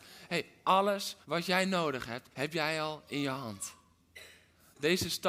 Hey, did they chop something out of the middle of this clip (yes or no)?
yes